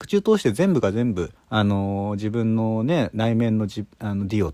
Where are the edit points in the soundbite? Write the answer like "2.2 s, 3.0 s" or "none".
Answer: 1.3 s